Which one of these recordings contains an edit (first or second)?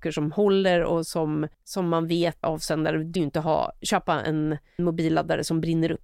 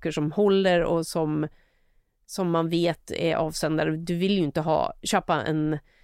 first